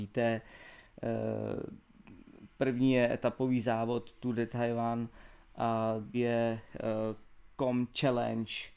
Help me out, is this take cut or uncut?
cut